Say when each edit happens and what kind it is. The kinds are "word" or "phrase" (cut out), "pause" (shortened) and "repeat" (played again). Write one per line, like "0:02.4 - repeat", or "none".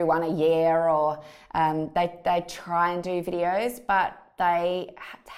none